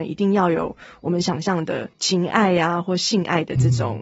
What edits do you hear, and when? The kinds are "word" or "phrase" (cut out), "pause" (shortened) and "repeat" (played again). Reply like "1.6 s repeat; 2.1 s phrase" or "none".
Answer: 1.9 s pause